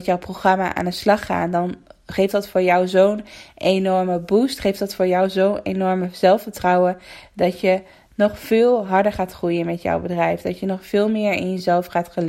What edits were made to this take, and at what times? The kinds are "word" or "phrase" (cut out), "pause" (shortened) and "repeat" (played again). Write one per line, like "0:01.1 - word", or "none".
none